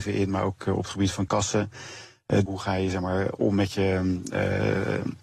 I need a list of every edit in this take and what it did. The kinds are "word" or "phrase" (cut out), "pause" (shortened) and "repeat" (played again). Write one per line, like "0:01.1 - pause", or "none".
0:01.3 - phrase
0:02.5 - phrase